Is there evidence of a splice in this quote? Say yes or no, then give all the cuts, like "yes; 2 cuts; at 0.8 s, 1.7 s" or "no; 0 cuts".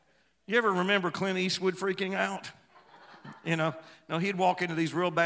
no; 0 cuts